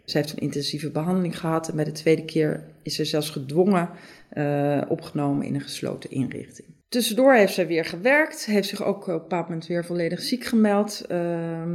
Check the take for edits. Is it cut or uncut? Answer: uncut